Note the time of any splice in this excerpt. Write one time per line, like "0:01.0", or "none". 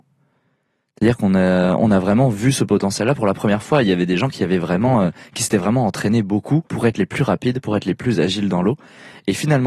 0:06.7